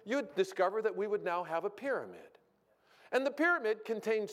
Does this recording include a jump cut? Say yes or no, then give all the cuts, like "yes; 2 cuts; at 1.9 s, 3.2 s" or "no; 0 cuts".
no; 0 cuts